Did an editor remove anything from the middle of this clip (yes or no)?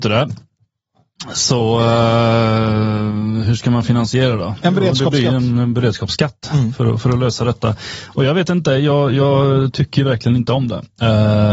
no